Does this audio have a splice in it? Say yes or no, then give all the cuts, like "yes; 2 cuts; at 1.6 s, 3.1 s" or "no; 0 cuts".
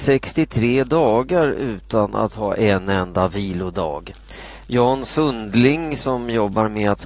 no; 0 cuts